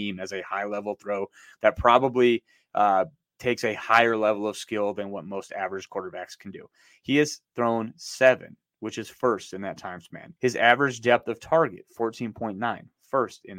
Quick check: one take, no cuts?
no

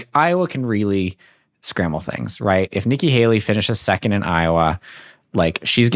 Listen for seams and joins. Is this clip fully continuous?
yes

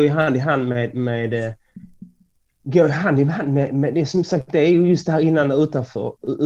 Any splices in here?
no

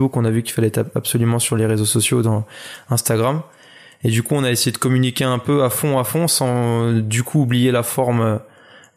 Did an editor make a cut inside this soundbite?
no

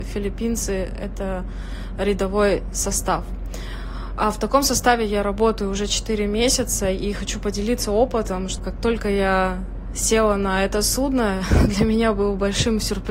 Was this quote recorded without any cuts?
yes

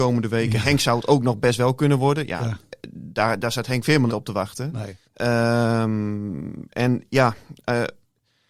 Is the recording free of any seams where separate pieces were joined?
no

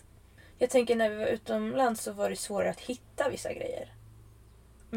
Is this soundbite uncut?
yes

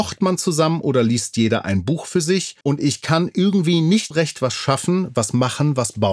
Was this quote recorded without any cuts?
no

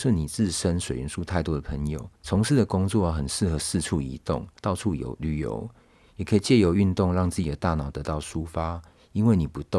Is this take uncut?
no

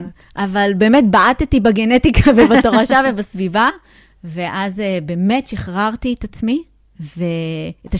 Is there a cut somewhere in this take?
no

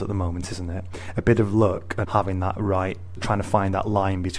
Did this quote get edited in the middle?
yes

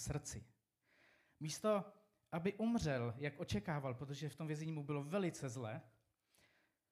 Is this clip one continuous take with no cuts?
yes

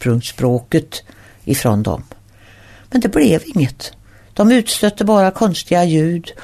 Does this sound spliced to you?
no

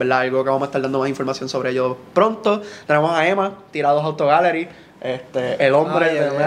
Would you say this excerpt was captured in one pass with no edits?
yes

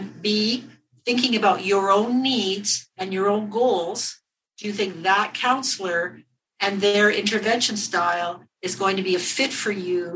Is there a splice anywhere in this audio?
no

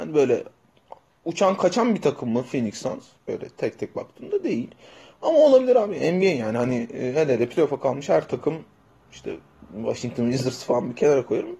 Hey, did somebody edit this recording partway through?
no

